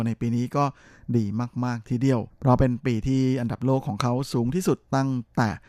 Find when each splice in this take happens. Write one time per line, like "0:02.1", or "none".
0:02.3